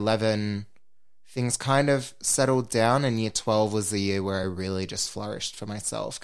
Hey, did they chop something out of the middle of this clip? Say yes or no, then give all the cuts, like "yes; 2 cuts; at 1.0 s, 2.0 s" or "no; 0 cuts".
no; 0 cuts